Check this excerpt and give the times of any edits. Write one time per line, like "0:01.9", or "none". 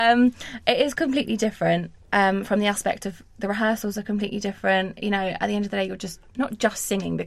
0:06.3

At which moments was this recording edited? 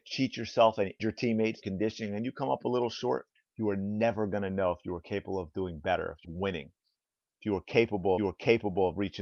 0:01.0
0:01.6
0:03.3
0:06.2
0:08.2

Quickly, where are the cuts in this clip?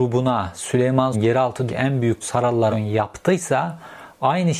0:01.1
0:01.7
0:02.2
0:02.7

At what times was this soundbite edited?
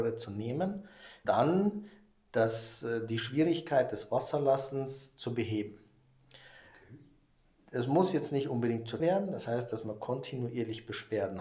0:01.2
0:09.0

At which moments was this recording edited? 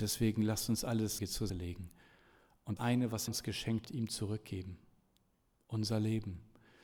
0:01.2
0:01.5
0:02.8
0:03.3
0:03.8

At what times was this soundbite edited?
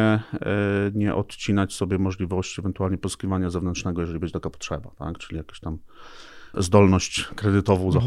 0:06.5

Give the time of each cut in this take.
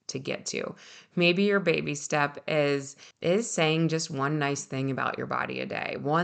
0:03.1

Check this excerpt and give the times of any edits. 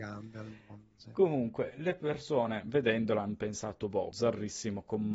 0:04.1

